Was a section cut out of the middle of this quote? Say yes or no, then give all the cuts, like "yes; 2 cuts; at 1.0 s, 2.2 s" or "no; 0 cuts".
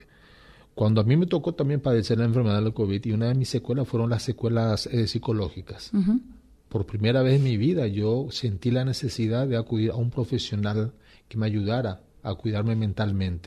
no; 0 cuts